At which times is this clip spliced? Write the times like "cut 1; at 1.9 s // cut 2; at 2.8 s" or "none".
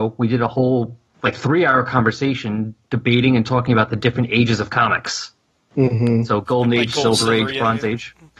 none